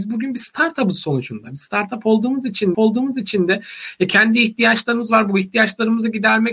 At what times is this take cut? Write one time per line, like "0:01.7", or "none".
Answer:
0:02.7